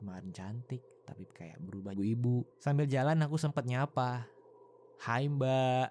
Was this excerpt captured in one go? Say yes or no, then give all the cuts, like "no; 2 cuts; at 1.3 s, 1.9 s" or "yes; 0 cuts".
no; 3 cuts; at 1.3 s, 1.9 s, 2.5 s